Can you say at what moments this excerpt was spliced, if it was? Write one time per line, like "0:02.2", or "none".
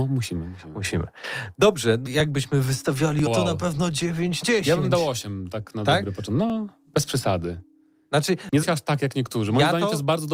0:02.1
0:03.3
0:04.4
0:08.6